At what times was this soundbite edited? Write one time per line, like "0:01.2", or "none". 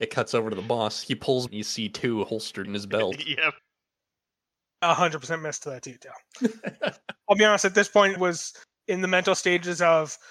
0:01.5
0:02.6
0:03.6
0:08.2